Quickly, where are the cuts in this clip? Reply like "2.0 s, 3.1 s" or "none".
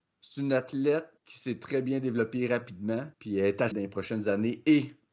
1.2 s, 3.1 s, 3.7 s